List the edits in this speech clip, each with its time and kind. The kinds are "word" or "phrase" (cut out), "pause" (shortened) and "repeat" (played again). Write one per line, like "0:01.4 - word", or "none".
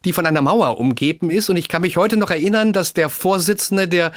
none